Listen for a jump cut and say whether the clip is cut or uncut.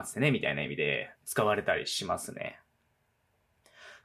cut